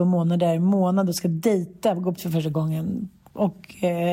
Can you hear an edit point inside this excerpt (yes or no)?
yes